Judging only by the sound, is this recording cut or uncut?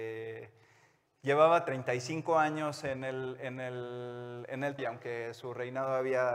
cut